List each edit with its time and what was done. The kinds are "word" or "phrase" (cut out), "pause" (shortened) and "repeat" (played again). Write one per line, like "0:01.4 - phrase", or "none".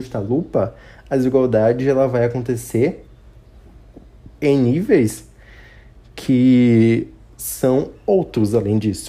0:04.3 - pause